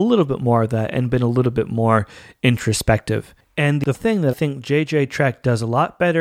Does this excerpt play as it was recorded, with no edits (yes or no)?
no